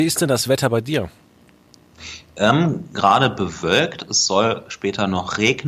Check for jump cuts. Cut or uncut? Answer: uncut